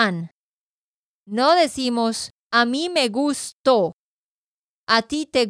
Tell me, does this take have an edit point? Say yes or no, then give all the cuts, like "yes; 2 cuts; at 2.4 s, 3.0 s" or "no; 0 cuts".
yes; 1 cut; at 2.4 s